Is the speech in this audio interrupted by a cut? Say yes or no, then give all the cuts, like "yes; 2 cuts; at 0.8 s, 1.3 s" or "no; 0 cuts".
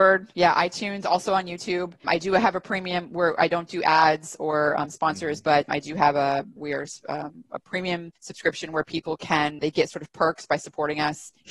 yes; 1 cut; at 8.2 s